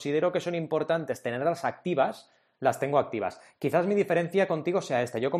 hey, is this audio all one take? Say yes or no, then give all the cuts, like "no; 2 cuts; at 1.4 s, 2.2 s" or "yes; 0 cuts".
yes; 0 cuts